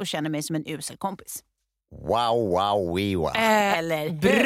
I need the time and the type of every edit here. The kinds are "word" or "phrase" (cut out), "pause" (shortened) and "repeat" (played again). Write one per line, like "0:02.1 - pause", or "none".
none